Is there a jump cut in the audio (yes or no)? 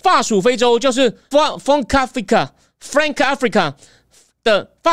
yes